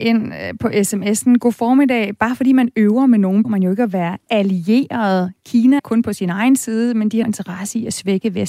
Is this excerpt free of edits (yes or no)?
no